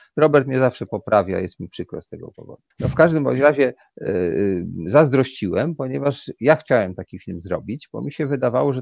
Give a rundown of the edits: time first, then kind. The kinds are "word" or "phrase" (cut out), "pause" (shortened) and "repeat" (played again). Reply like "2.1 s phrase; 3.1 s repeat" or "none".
2.7 s pause